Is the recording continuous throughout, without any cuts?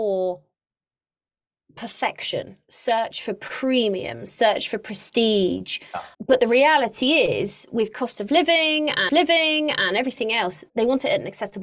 no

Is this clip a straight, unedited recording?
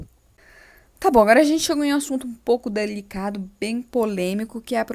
yes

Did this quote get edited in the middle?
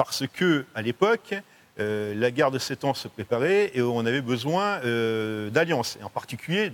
no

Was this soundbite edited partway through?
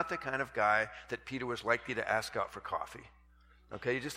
no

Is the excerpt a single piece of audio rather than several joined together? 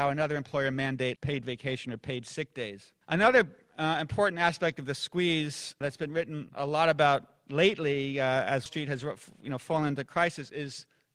no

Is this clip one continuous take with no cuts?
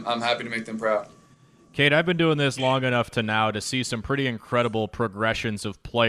yes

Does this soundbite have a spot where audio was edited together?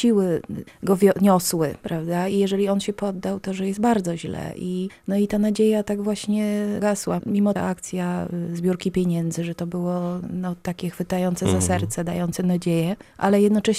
yes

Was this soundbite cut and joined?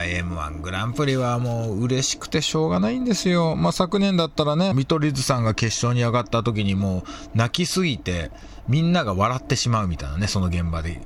yes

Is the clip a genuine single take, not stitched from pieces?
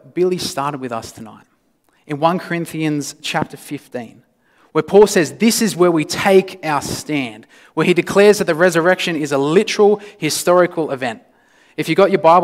yes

